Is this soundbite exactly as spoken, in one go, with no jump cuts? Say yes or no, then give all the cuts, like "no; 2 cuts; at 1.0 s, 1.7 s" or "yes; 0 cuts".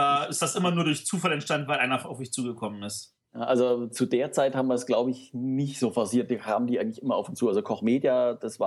yes; 0 cuts